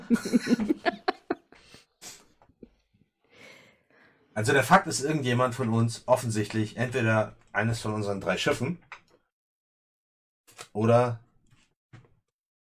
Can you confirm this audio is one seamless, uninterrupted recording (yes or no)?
yes